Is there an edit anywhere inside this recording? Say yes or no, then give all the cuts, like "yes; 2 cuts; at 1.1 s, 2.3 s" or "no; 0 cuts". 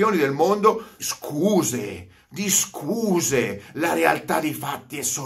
yes; 1 cut; at 1.0 s